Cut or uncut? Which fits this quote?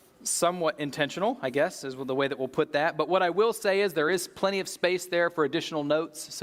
uncut